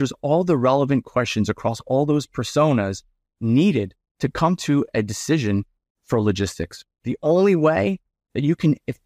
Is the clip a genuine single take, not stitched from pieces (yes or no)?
yes